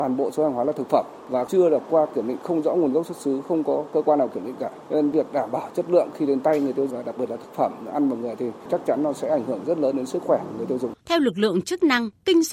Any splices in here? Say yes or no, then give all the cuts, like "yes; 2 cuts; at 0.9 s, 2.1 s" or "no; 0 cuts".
yes; 2 cuts; at 6.9 s, 11.0 s